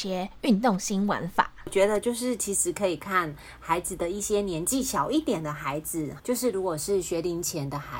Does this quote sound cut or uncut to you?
cut